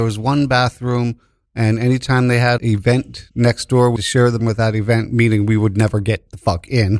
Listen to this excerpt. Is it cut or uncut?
cut